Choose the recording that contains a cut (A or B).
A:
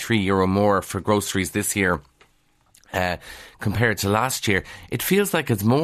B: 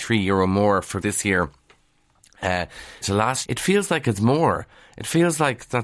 B